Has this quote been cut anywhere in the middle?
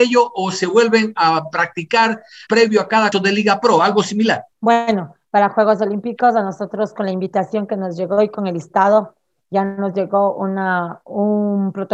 yes; 3 cuts; at 2.5 s, 3.1 s, 4.5 s

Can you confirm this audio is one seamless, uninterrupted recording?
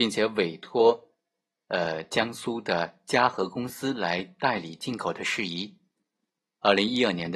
yes; 0 cuts

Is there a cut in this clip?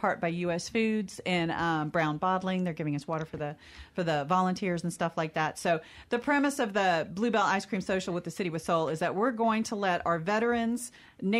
no; 0 cuts

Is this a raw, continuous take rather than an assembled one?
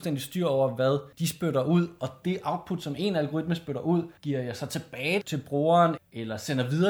no; 4 cuts; at 1.1 s, 4.2 s, 5.2 s, 6.0 s

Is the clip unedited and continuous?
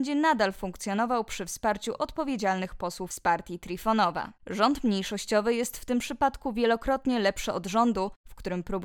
no; 1 cut; at 4.4 s

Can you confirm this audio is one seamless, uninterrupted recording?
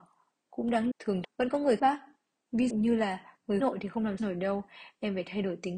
no; 6 cuts; at 0.9 s, 1.2 s, 1.8 s, 2.7 s, 3.6 s, 4.2 s

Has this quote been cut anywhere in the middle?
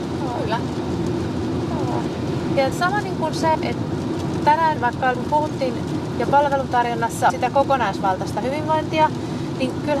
yes; 5 cuts; at 2.7 s, 3.5 s, 4.8 s, 5.1 s, 7.3 s

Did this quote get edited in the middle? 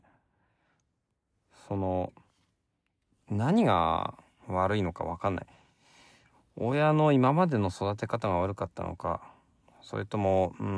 no; 0 cuts

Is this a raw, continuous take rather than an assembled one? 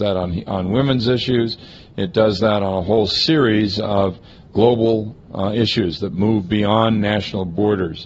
yes; 0 cuts

